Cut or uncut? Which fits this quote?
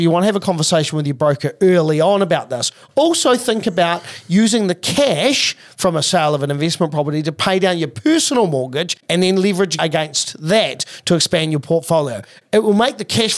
cut